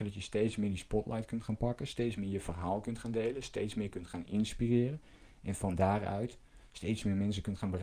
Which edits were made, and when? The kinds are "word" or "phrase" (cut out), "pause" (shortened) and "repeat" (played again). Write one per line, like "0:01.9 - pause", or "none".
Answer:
none